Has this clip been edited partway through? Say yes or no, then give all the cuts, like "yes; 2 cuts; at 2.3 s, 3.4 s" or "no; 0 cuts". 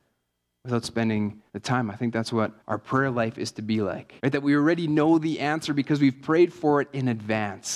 yes; 3 cuts; at 1.5 s, 2.6 s, 4.2 s